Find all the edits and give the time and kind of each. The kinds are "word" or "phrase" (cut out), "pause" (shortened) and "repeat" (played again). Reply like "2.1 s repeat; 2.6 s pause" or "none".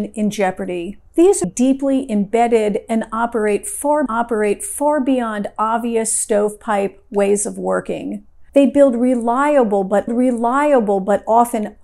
1.1 s pause; 1.4 s word; 4.1 s repeat; 8.5 s pause; 10.1 s repeat